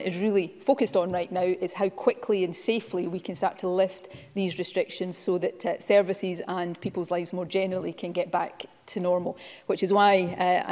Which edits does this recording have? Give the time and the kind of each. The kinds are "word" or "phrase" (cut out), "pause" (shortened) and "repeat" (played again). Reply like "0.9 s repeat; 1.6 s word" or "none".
none